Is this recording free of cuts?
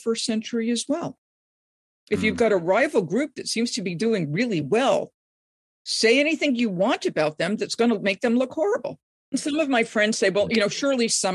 yes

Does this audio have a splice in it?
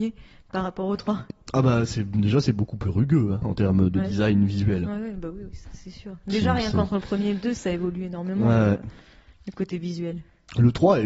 no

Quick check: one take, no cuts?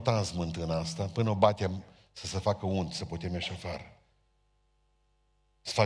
yes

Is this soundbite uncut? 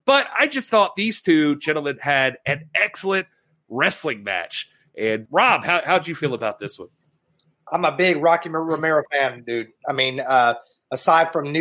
no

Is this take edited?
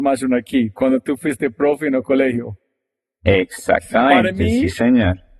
no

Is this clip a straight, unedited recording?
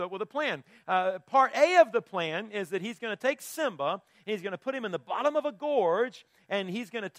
yes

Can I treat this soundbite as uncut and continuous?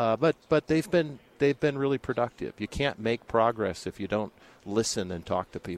yes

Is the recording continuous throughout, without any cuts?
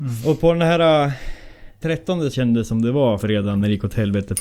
no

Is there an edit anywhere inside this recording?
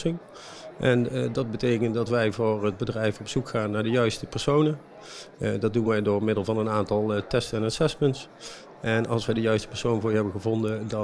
no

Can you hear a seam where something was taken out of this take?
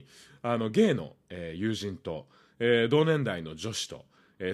no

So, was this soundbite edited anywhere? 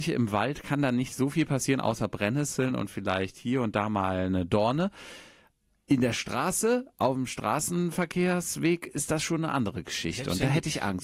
no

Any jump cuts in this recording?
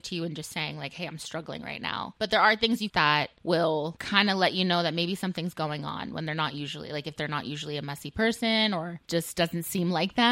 yes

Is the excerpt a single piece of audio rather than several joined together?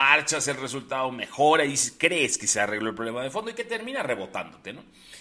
yes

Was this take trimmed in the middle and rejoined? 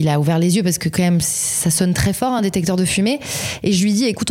no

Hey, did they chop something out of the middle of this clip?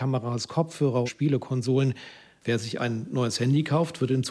yes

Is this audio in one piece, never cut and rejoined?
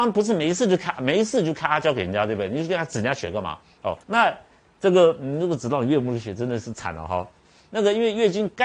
no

